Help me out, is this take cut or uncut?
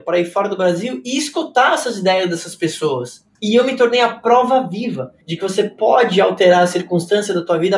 cut